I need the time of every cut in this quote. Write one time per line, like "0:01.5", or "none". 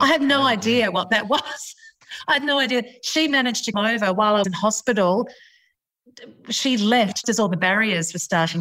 0:03.7
0:04.4
0:07.2